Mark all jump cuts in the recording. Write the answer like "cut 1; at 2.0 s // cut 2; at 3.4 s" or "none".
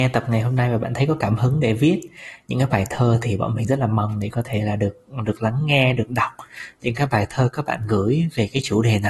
none